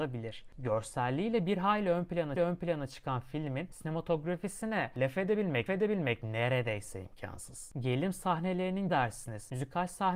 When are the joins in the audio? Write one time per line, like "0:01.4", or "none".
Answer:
0:02.4
0:05.7
0:08.9